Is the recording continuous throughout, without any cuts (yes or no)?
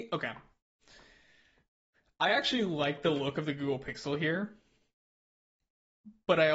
yes